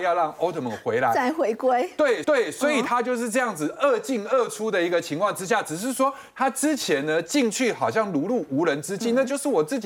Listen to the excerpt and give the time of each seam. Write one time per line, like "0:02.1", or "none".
0:02.2